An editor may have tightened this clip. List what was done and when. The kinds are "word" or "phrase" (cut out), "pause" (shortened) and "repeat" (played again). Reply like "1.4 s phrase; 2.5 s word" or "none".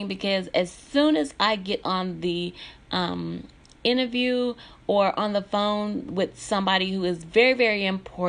none